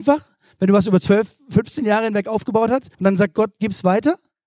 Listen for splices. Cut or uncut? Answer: cut